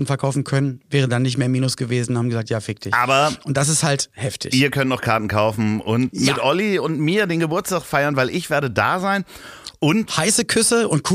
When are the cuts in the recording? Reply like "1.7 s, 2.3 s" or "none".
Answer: none